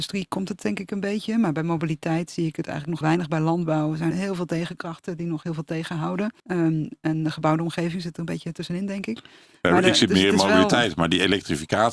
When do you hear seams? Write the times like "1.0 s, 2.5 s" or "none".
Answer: 3.0 s, 4.1 s, 6.4 s